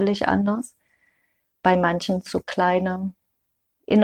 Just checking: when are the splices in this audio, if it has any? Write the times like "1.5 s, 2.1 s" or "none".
2.2 s